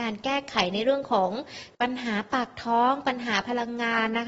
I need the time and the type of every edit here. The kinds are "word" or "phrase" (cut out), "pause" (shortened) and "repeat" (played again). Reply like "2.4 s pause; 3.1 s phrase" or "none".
1.7 s pause